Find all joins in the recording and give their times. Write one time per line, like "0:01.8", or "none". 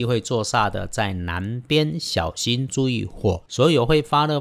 0:03.5